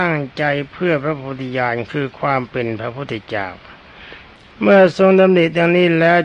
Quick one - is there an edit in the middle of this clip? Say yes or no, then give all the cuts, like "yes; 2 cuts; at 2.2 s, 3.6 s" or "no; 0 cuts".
no; 0 cuts